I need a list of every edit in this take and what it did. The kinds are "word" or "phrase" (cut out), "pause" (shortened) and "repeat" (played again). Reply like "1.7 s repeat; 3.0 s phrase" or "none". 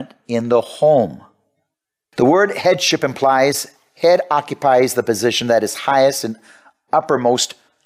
none

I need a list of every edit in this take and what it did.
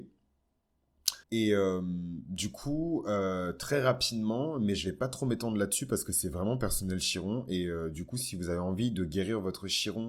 1.2 s pause

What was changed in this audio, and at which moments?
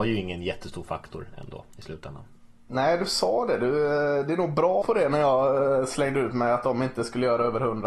4.8 s word

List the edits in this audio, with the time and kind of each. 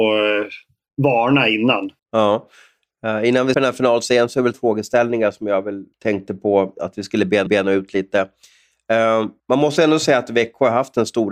2.0 s pause; 3.5 s word; 4.5 s word; 5.9 s pause; 7.5 s repeat; 9.4 s pause

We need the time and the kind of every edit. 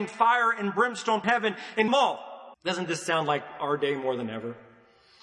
1.2 s word; 1.9 s phrase; 2.5 s pause

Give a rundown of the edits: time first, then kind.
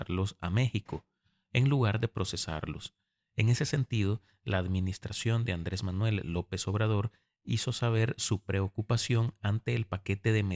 none

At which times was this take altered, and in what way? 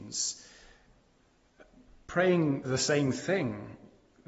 2.6 s word

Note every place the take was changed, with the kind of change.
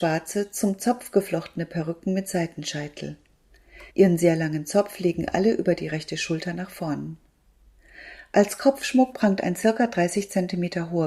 3.9 s pause

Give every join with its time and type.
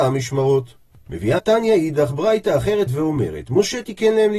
1.4 s word; 2.9 s word

